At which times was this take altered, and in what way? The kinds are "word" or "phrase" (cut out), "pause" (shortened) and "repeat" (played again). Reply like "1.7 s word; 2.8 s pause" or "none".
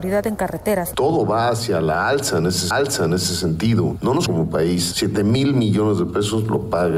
2.7 s repeat; 4.3 s word